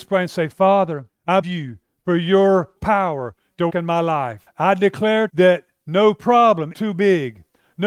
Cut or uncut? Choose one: cut